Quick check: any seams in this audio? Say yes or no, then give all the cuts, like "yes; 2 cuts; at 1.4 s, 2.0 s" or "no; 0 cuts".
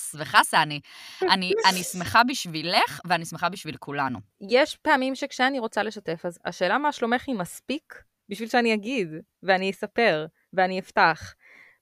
no; 0 cuts